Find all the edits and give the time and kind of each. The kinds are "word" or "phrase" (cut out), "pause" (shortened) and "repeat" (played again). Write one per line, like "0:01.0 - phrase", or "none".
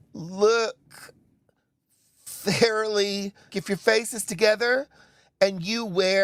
0:03.5 - word